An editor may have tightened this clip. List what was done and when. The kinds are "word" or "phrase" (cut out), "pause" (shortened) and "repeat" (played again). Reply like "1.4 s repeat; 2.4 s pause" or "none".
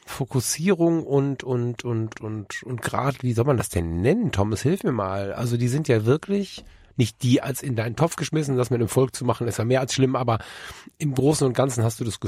2.1 s word